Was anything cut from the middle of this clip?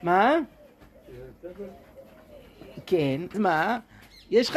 yes; 1 cut; at 3.3 s

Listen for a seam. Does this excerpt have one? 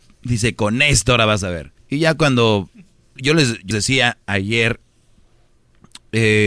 yes; 3 cuts; at 1.8 s, 3.2 s, 3.7 s

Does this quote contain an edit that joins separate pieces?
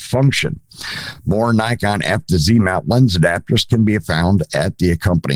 no; 0 cuts

